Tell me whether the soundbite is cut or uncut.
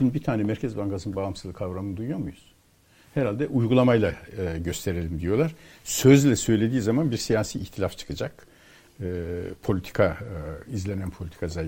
uncut